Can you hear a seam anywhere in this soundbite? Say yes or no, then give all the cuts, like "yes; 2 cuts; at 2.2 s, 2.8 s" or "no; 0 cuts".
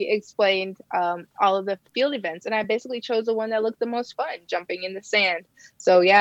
no; 0 cuts